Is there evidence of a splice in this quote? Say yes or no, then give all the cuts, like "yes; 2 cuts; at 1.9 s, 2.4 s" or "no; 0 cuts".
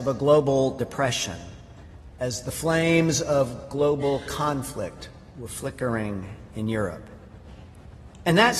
no; 0 cuts